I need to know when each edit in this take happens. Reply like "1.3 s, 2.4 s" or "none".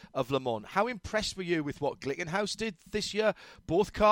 none